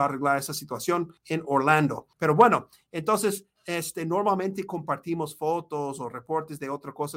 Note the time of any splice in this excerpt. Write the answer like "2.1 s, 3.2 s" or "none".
1.2 s, 2.1 s